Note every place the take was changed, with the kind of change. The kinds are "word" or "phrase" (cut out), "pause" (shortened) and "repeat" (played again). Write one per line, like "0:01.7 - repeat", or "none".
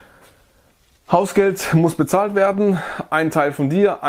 none